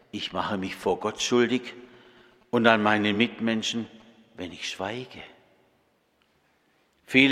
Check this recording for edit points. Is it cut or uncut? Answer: uncut